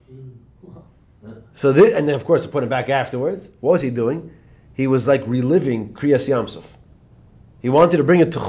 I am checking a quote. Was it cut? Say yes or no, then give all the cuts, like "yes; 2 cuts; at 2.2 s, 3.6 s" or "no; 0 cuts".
no; 0 cuts